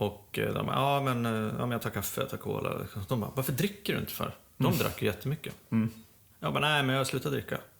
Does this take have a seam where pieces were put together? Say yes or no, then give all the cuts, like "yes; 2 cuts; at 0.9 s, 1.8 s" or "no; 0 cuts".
yes; 1 cut; at 6.2 s